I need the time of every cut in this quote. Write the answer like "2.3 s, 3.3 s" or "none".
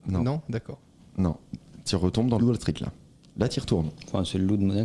2.4 s